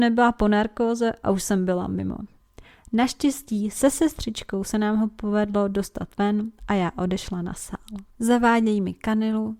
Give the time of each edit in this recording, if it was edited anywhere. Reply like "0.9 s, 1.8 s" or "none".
8.1 s